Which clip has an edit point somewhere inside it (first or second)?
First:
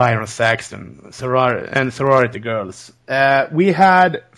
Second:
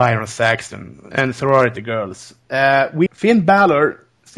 second